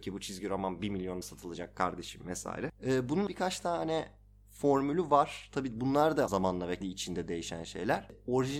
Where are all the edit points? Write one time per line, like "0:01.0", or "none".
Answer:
0:01.2
0:03.3
0:06.3
0:06.8